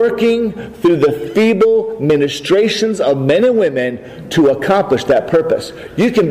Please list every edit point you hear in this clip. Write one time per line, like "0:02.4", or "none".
none